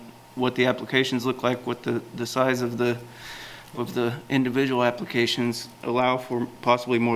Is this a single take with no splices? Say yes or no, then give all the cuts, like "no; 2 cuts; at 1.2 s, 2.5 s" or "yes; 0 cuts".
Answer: no; 1 cut; at 3.7 s